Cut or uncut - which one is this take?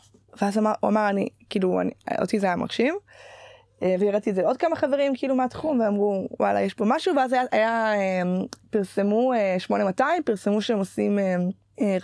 uncut